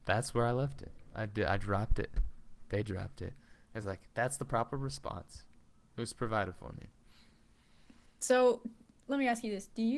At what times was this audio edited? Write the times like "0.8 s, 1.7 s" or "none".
none